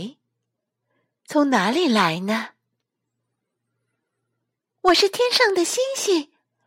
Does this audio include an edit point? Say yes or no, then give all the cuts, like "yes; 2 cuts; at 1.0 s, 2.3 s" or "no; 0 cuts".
no; 0 cuts